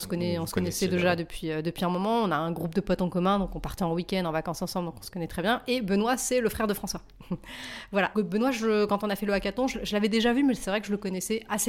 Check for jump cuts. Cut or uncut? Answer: cut